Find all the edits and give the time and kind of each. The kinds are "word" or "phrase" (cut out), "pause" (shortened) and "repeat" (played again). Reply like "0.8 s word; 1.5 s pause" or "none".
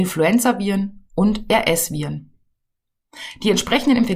1.1 s word